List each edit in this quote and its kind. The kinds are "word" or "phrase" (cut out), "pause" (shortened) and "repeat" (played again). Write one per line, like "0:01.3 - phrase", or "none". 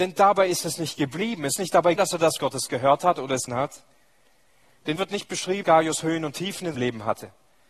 0:01.6 - word
0:02.0 - word
0:02.4 - word
0:03.5 - word
0:05.0 - word
0:05.6 - word
0:06.7 - word

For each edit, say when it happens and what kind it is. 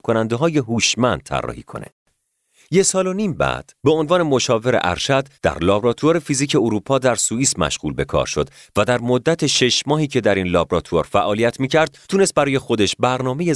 0:03.8 - pause
0:05.3 - pause
0:12.0 - pause

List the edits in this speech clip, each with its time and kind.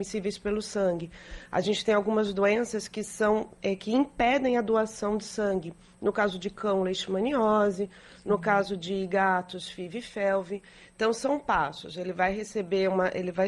none

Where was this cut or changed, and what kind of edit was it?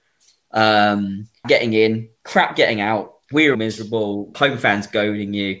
0:01.4 - word
0:02.2 - pause
0:03.2 - pause
0:03.5 - word
0:04.3 - word

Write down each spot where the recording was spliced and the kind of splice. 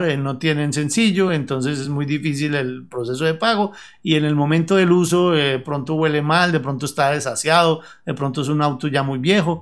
none

